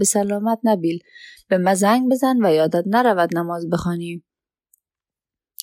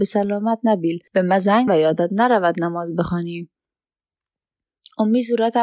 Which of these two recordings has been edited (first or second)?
second